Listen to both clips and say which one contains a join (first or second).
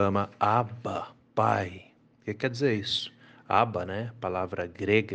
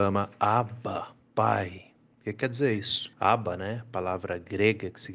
second